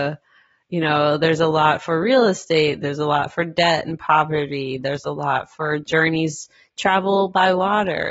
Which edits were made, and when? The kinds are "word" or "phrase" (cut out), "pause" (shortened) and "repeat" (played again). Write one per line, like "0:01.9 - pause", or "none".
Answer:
none